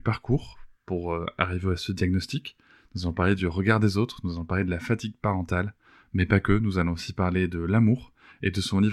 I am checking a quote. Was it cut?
no; 0 cuts

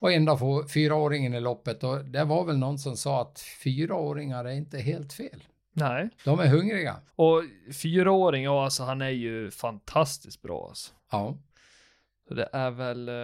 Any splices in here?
yes; 3 cuts; at 6.2 s, 7.1 s, 11.0 s

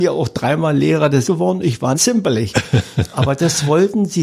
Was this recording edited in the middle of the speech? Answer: yes; 2 cuts; at 1.2 s, 1.9 s

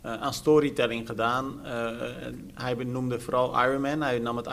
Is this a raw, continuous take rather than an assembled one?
yes; 0 cuts

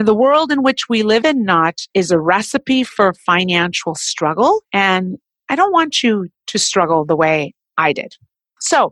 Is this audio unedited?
no; 3 cuts; at 1.2 s, 1.9 s, 4.7 s

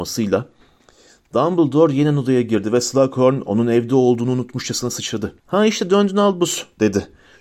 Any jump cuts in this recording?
yes; 1 cut; at 5.4 s

